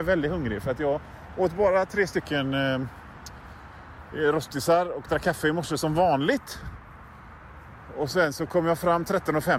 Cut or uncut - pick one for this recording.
uncut